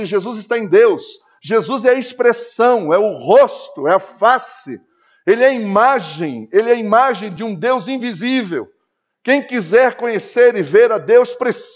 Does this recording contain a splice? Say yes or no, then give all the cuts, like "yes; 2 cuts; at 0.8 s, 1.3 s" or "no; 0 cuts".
no; 0 cuts